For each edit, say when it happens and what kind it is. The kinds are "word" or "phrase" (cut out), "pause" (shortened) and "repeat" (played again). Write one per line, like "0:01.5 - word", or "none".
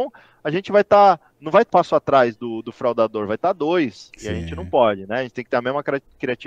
0:01.3 - pause
0:01.7 - word